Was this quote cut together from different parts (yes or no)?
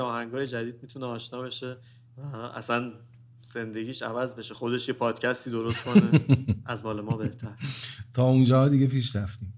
no